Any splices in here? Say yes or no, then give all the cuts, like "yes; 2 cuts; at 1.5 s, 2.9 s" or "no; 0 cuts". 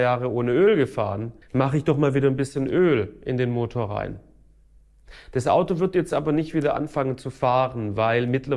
yes; 1 cut; at 1.4 s